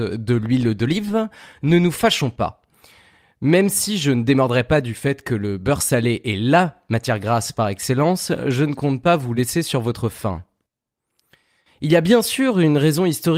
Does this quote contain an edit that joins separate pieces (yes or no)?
no